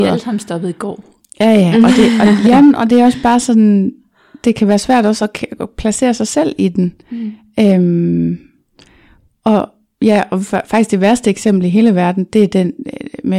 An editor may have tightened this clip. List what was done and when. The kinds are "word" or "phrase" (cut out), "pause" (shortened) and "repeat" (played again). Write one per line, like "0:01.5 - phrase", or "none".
none